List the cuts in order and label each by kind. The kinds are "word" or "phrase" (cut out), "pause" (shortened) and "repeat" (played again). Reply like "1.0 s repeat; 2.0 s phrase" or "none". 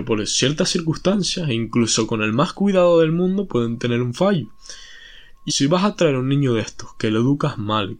5.5 s word

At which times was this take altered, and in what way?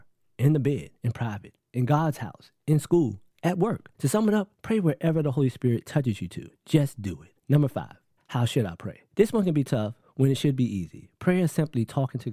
1.0 s pause; 3.9 s pause; 4.5 s pause; 7.4 s pause; 8.2 s pause; 9.1 s pause

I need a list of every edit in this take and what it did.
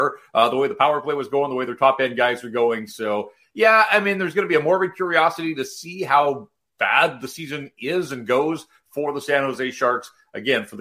none

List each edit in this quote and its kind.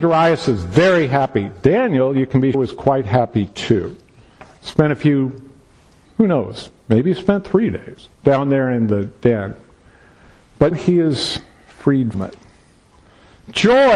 2.5 s word; 6.1 s word; 8.1 s pause; 10.7 s word; 12.1 s word

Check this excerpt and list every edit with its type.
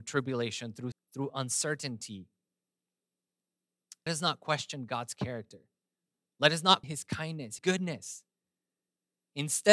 0.9 s word; 4.1 s word; 6.8 s word; 7.6 s word

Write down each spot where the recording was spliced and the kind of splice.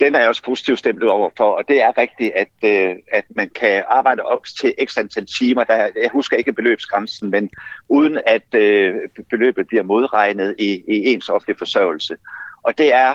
none

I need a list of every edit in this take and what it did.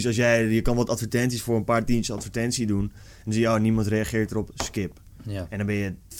none

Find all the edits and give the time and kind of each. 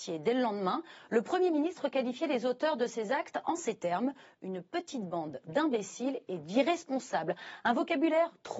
none

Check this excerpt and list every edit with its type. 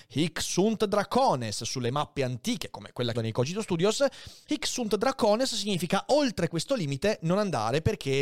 3.1 s phrase

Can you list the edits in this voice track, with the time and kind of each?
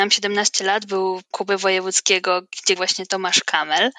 1.3 s word; 2.8 s word

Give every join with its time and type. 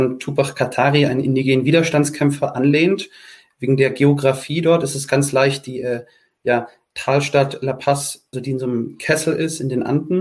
8.3 s word

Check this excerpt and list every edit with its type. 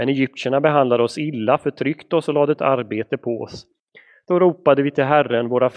2.6 s word

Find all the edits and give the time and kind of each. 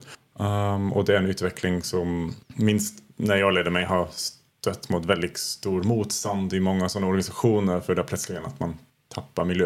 2.4 s pause

